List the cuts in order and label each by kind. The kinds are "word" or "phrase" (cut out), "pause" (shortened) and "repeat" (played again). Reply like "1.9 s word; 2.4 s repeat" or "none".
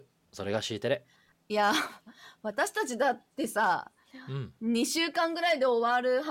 1.3 s pause